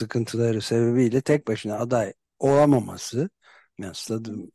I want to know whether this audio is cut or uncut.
uncut